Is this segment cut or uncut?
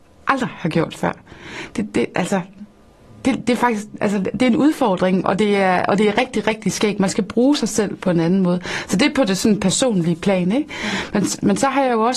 uncut